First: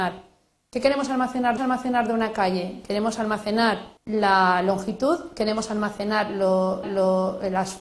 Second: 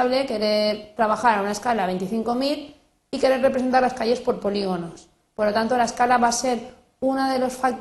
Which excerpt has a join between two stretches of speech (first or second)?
first